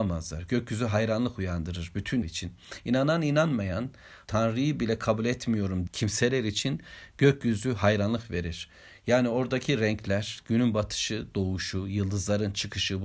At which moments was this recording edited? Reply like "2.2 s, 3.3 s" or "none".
2.2 s, 4.2 s, 5.9 s